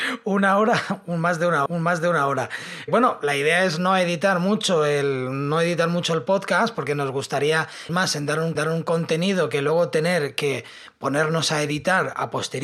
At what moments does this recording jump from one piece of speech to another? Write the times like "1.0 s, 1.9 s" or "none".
1.7 s, 7.9 s, 8.6 s